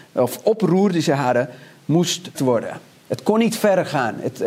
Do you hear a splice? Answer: yes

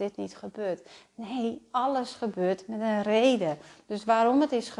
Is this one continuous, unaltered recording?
yes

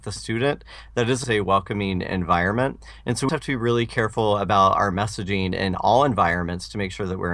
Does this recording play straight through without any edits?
no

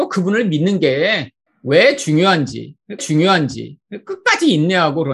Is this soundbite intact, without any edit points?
no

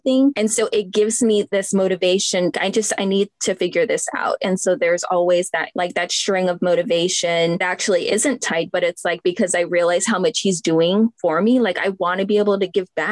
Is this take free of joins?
no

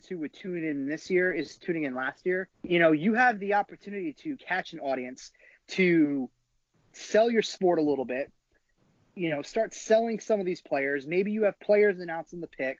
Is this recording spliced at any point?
yes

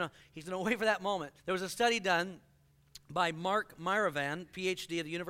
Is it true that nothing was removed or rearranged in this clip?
no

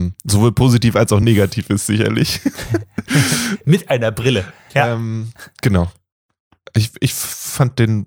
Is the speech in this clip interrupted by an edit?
no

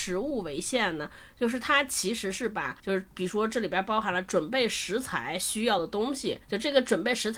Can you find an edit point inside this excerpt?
yes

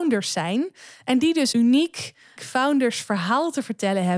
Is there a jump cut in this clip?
yes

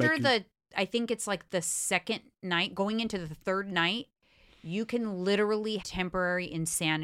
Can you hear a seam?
yes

